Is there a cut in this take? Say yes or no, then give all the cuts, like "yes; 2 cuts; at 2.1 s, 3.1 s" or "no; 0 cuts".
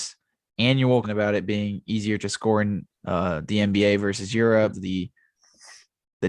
yes; 3 cuts; at 1.0 s, 2.9 s, 4.7 s